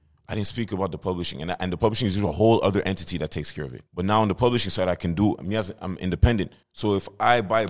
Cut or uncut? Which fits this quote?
cut